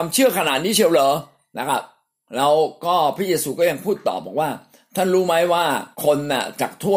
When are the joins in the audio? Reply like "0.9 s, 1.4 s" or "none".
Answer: 2.2 s, 5.9 s